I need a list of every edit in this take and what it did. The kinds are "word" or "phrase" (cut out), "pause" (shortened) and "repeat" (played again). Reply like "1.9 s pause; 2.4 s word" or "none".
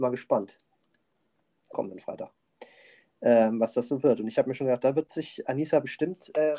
1.7 s word